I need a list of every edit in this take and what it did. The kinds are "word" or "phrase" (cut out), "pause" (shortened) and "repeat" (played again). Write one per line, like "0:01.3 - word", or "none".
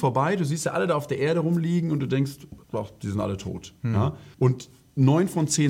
0:02.6 - pause
0:04.3 - pause